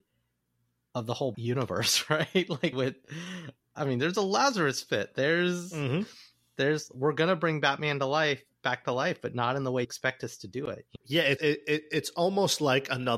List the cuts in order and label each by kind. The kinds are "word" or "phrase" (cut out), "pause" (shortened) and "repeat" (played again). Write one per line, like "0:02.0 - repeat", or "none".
0:01.3 - word
0:02.7 - word
0:03.8 - word
0:09.8 - word
0:11.0 - word
0:11.4 - word